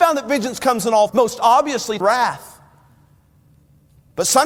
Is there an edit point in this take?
yes; 2 cuts; at 1.1 s, 2.0 s

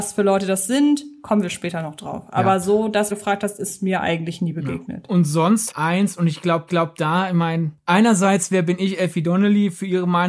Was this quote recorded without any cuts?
no; 3 cuts; at 3.1 s, 5.7 s, 6.7 s

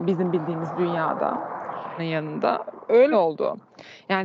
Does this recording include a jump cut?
yes; 2 cuts; at 2.0 s, 3.1 s

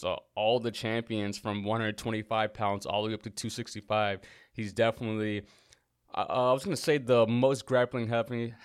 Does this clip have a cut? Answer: no; 0 cuts

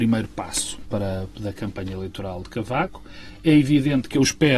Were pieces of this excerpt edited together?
no; 0 cuts

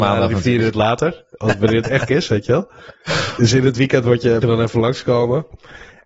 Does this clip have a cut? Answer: yes; 2 cuts; at 2.1 s, 4.4 s

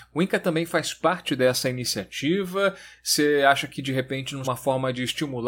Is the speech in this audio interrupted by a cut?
yes; 1 cut; at 4.4 s

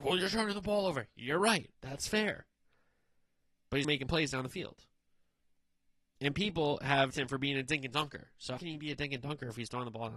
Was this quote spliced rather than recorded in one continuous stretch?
yes; 4 cuts; at 1.7 s, 3.8 s, 7.1 s, 8.6 s

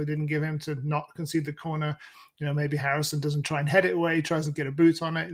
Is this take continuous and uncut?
yes; 0 cuts

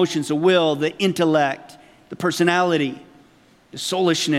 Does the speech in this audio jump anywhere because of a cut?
no; 0 cuts

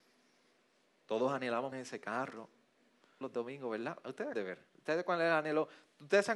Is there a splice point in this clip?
yes; 4 cuts; at 1.7 s, 3.2 s, 4.3 s, 4.7 s

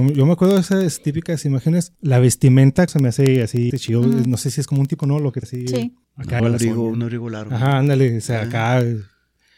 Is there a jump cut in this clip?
yes; 7 cuts; at 2.0 s, 2.9 s, 3.7 s, 5.0 s, 5.4 s, 6.0 s, 6.4 s

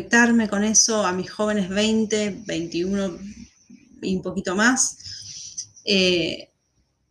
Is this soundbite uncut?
yes; 0 cuts

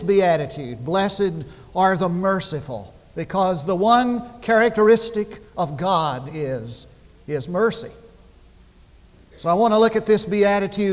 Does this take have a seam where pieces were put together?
no; 0 cuts

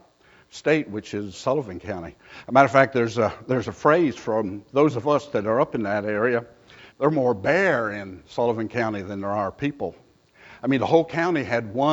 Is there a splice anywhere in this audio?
yes; 2 cuts; at 1.3 s, 6.9 s

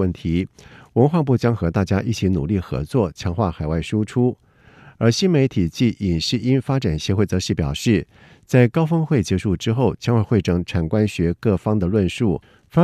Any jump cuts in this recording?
no; 0 cuts

